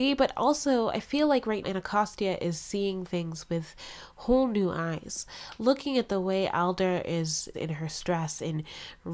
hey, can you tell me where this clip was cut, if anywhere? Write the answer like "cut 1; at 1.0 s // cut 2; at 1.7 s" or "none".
cut 1; at 1.6 s // cut 2; at 7.5 s